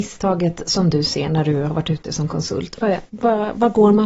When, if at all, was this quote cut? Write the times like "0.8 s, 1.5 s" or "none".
none